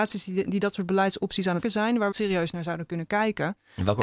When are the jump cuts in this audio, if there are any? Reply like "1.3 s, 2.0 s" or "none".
1.6 s, 2.1 s